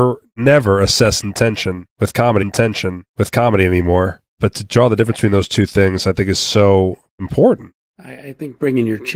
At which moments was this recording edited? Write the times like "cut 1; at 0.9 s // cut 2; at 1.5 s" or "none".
cut 1; at 2.4 s